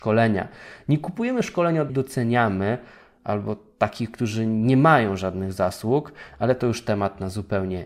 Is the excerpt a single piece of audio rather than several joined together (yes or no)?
no